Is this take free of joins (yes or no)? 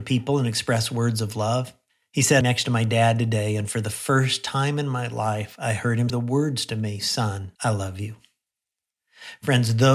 no